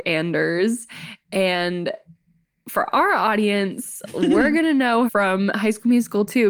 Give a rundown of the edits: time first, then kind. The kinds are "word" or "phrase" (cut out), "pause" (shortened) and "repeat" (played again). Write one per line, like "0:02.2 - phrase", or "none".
0:05.1 - word